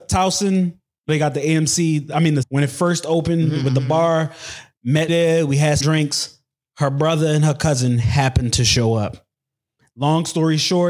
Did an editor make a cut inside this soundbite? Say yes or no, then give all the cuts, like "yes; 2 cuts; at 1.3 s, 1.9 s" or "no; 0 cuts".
yes; 4 cuts; at 1.1 s, 2.4 s, 5.1 s, 5.8 s